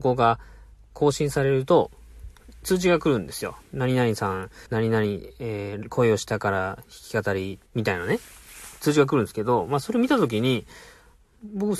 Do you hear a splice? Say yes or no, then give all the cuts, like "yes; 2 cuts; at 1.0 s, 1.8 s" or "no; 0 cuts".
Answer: yes; 2 cuts; at 4.7 s, 7.7 s